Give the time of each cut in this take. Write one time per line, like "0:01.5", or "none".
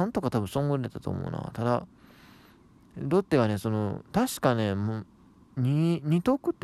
none